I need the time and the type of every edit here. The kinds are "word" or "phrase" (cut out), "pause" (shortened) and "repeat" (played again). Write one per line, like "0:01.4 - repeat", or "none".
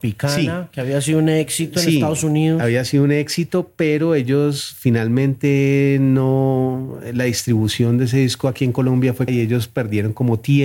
0:09.3 - word